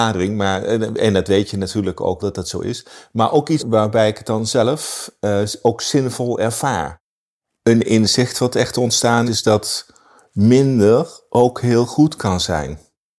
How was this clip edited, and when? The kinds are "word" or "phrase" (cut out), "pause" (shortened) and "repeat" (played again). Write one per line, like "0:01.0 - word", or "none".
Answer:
0:02.2 - word
0:03.6 - word
0:09.3 - word